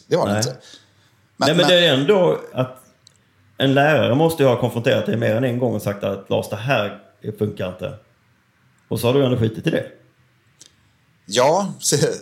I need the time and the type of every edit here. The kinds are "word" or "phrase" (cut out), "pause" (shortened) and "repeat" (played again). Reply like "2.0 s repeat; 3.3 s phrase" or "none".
2.5 s word